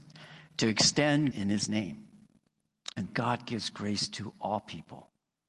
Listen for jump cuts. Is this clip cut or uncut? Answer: cut